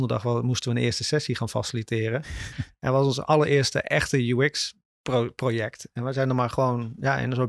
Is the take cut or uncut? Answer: uncut